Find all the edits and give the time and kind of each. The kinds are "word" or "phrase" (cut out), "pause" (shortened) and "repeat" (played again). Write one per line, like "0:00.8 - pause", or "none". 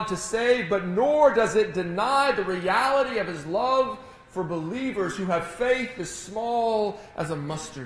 none